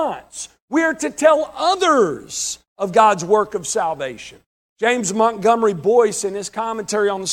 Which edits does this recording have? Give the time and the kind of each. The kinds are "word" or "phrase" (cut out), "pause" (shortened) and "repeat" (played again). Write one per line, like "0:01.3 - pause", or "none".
0:04.5 - pause